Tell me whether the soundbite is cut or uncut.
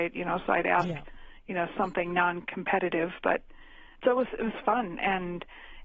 cut